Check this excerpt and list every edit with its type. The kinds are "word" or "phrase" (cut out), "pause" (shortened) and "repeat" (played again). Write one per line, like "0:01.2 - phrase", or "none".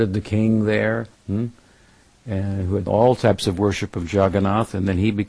0:01.2 - pause
0:02.9 - word